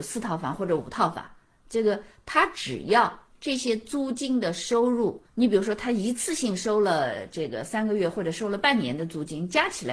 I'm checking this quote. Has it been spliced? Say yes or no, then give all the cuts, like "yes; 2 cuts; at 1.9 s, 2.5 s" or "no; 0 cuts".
yes; 1 cut; at 5.3 s